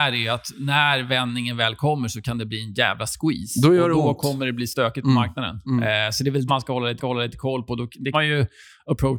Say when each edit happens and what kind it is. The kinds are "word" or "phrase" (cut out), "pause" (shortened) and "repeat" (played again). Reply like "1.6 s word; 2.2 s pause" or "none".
6.5 s word; 7.0 s repeat; 8.1 s word

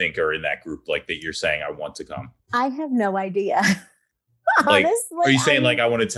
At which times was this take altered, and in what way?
none

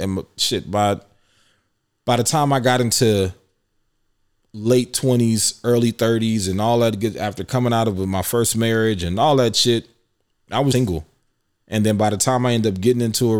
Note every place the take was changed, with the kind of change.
10.7 s word

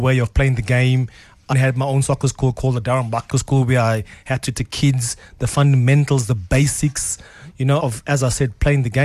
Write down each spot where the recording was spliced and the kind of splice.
1.5 s word; 3.3 s word; 4.5 s word; 7.8 s word

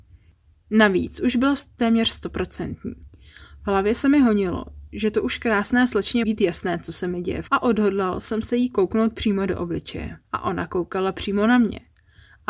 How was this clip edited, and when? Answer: 6.2 s word; 7.5 s word; 10.2 s pause

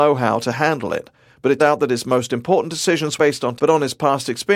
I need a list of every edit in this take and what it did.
1.6 s word; 3.2 s word; 3.6 s word

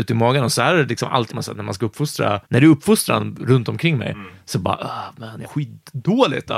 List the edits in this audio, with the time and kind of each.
1.3 s word; 2.4 s pause; 5.4 s word

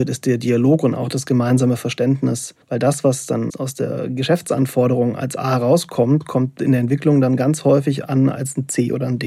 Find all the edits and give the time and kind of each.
2.6 s pause; 3.5 s word

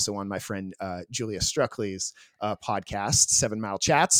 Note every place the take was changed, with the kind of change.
none

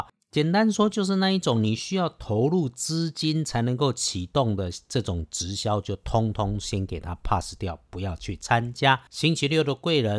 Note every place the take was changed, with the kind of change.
9.1 s pause

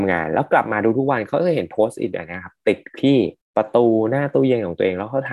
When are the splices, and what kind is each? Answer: 3.4 s pause

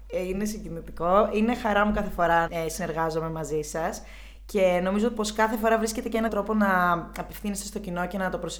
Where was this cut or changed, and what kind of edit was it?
2.5 s word; 6.3 s word

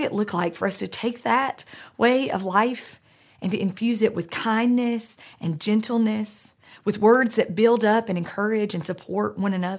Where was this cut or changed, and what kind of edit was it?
none

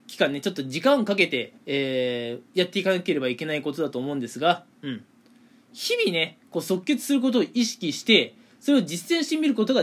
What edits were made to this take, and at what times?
1.6 s pause

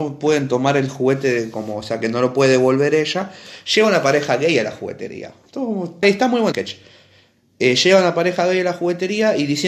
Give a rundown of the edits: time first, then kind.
6.0 s word; 6.5 s word

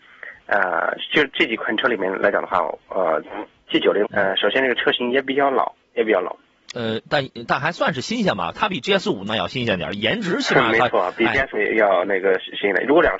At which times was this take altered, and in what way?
4.0 s phrase; 5.8 s pause; 11.5 s word

